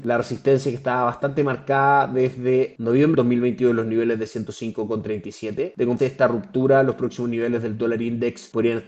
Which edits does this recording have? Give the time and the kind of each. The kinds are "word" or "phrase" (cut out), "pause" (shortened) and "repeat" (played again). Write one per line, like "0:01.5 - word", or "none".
0:03.1 - word
0:06.0 - word